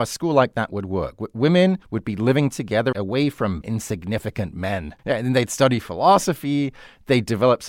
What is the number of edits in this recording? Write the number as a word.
four